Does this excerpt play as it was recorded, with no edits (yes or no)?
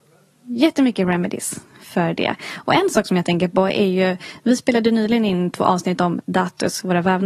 yes